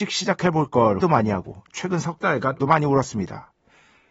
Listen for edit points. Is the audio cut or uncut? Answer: cut